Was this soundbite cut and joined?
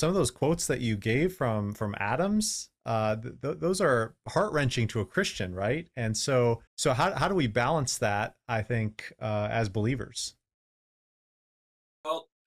yes; 1 cut; at 6.7 s

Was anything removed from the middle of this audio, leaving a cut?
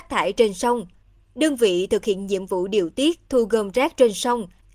no; 0 cuts

